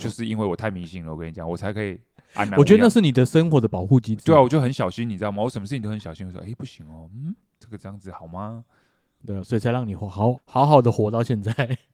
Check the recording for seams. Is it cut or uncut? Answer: cut